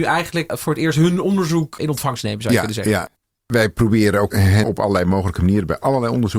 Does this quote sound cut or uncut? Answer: cut